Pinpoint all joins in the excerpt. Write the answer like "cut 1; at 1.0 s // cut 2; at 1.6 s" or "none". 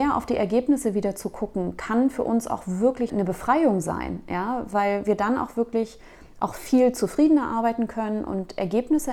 none